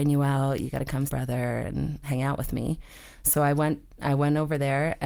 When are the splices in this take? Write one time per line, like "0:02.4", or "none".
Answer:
0:01.1
0:02.0